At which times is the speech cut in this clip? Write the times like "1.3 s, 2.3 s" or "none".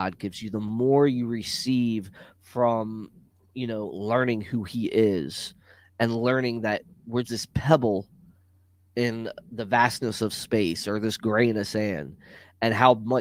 7.2 s